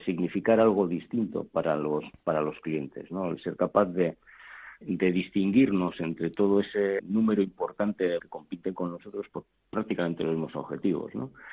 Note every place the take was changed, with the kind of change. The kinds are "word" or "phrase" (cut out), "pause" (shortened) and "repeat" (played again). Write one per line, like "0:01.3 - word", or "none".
0:04.8 - word
0:07.0 - word
0:08.2 - word
0:09.3 - word